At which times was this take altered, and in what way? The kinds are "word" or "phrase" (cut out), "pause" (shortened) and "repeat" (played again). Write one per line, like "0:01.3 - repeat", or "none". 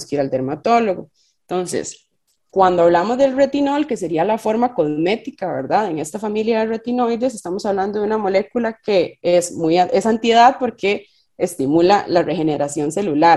none